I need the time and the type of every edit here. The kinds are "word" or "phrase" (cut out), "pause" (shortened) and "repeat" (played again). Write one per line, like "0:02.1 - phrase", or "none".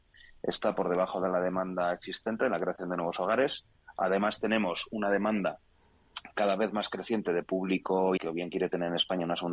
0:08.2 - word